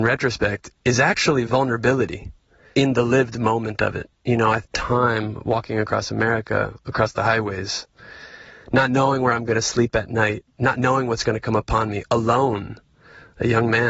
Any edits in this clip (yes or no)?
yes